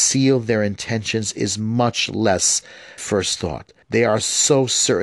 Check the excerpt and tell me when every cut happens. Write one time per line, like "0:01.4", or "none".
0:03.0
0:03.8

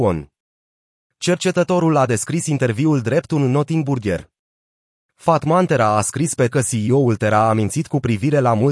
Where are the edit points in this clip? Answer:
0:06.5

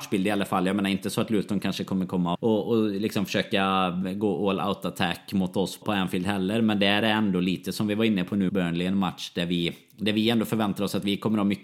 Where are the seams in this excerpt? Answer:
0:02.3
0:05.8
0:08.5

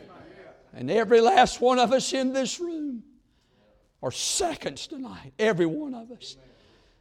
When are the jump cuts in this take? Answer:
none

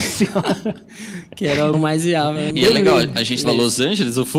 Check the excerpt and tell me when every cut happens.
0:01.7
0:02.5
0:03.4

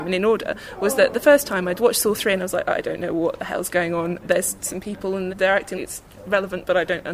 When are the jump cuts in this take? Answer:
0:05.3
0:05.8

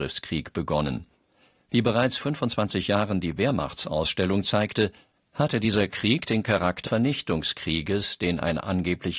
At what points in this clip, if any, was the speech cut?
0:02.2
0:06.9

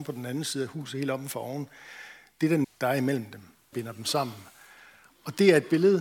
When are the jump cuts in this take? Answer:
0:02.6
0:03.7

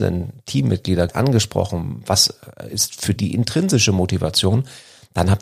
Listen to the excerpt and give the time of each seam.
0:01.1
0:03.2

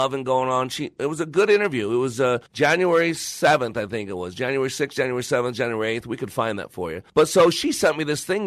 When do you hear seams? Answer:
0:02.5
0:07.1

